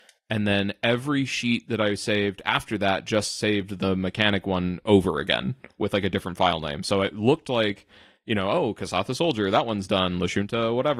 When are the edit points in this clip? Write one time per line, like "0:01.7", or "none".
none